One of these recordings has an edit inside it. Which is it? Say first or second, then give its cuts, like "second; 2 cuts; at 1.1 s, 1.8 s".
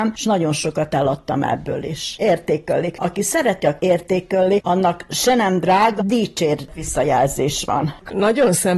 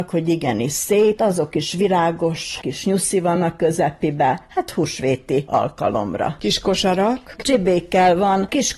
first; 2 cuts; at 3.8 s, 6.0 s